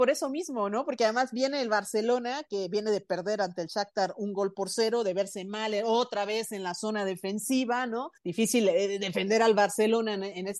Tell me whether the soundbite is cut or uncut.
cut